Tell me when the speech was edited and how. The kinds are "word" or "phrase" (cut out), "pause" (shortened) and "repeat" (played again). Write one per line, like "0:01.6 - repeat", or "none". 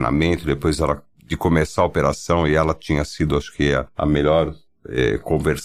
none